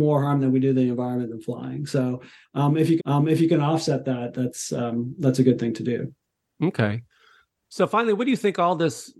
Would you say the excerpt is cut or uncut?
cut